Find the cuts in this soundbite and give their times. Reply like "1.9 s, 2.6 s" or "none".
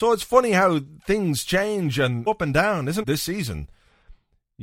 2.3 s, 3.0 s